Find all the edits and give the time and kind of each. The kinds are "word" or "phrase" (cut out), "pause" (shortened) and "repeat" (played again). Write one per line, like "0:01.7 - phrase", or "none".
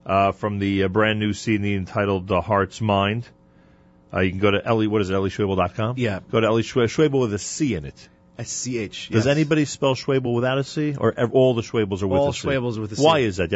none